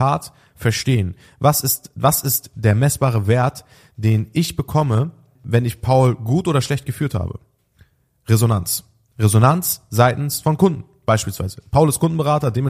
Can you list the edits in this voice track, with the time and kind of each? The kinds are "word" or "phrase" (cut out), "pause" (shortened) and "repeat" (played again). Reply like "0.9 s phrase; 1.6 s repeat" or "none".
5.3 s word